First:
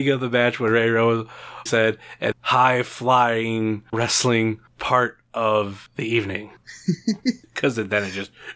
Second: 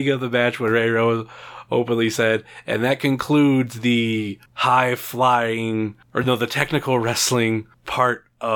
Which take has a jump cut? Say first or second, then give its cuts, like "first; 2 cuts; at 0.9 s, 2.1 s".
first; 3 cuts; at 1.7 s, 2.3 s, 3.9 s